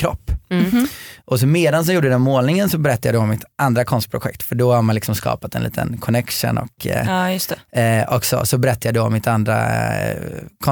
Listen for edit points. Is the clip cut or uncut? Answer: cut